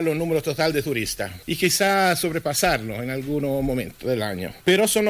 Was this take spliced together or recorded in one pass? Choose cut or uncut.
uncut